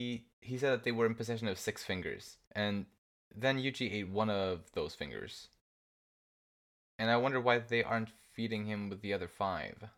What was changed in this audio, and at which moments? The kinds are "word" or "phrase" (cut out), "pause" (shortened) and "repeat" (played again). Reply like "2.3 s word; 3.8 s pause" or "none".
2.4 s pause